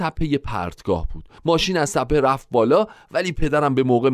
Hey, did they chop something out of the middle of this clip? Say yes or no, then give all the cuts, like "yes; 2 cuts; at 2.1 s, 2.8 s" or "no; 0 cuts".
yes; 1 cut; at 1.4 s